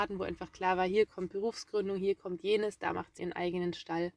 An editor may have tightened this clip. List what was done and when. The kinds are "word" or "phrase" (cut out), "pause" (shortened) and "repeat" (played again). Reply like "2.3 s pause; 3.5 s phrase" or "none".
1.3 s word; 3.2 s word